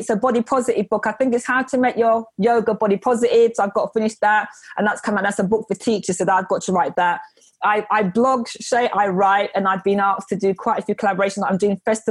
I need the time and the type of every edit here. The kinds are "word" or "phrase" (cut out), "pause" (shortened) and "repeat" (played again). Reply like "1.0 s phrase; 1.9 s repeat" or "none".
none